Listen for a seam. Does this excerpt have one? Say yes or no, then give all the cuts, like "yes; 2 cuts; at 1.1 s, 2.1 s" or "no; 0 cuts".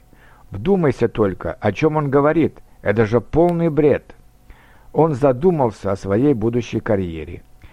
no; 0 cuts